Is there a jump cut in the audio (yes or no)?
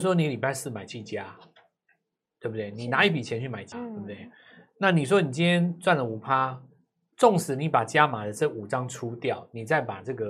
yes